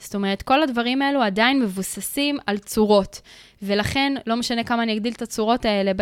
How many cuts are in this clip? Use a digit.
0